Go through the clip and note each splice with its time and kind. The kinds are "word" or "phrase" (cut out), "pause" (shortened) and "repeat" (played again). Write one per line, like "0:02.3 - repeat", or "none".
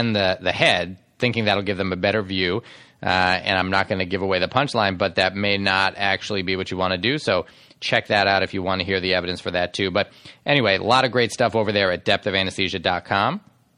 none

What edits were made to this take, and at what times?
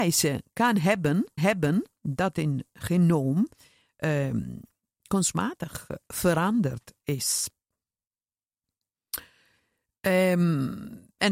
0:01.4 - repeat

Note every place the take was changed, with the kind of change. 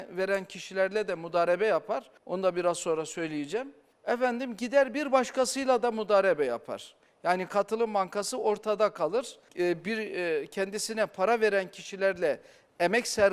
0:02.2 - pause
0:03.9 - pause
0:09.5 - pause

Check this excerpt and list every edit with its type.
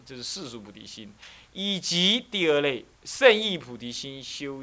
0:02.9 - pause

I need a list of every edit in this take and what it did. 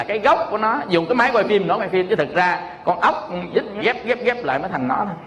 0:01.8 - word
0:03.8 - word

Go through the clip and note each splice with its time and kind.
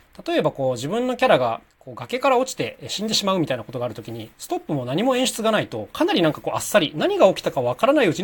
0:01.7 - pause
0:04.3 - pause

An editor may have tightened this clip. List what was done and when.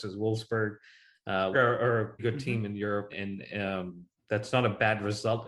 0:01.5 - phrase
0:02.2 - word
0:03.1 - word
0:04.1 - pause

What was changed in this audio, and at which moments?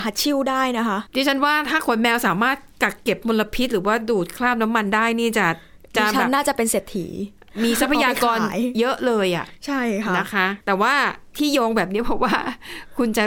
0:01.1 - pause
0:10.6 - pause

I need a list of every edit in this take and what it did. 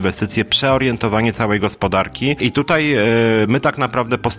none

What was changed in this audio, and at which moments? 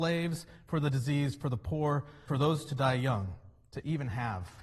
0:02.3 - word

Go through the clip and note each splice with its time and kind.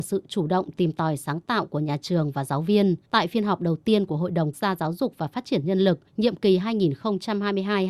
0:03.0 - pause
0:04.5 - word
0:06.1 - pause

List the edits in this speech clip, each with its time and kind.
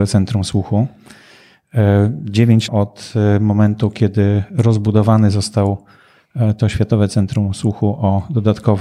0:02.7 - phrase

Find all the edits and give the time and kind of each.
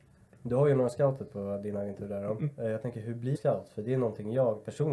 0:03.3 - word

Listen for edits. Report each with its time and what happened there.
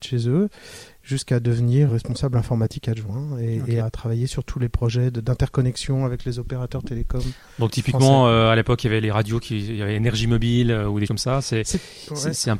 0:01.9 - word
0:03.8 - word
0:11.1 - word

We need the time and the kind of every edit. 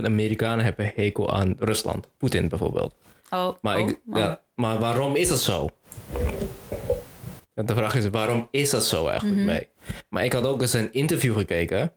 none

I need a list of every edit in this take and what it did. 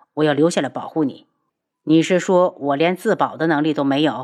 none

